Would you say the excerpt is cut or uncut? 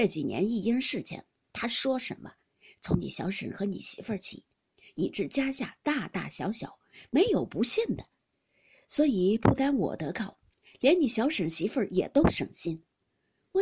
uncut